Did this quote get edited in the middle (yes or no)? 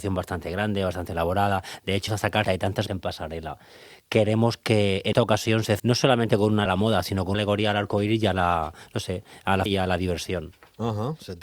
yes